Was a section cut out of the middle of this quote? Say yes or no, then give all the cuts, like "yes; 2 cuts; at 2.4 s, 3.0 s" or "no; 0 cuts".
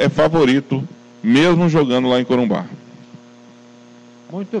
no; 0 cuts